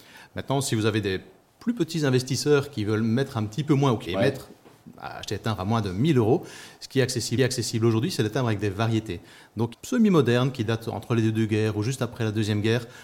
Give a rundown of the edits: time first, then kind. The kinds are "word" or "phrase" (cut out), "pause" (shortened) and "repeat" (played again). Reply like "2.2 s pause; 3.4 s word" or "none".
4.0 s phrase; 7.4 s repeat; 9.7 s phrase